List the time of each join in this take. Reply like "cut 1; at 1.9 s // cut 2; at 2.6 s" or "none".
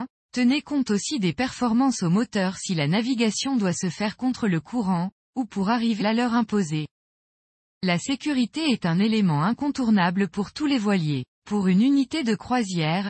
cut 1; at 6.0 s // cut 2; at 11.3 s